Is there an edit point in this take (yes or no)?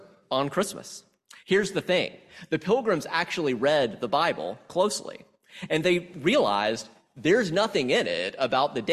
no